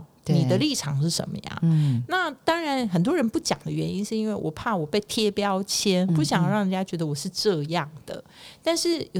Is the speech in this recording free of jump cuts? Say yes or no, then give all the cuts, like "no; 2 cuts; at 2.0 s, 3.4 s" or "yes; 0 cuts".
no; 1 cut; at 6.1 s